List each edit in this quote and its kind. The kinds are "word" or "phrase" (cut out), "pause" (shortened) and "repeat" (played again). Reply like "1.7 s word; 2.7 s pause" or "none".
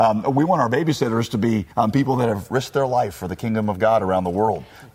1.7 s pause